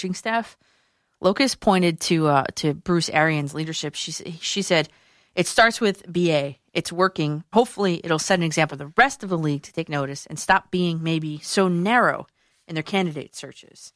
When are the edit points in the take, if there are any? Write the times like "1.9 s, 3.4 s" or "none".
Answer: 7.5 s, 8.7 s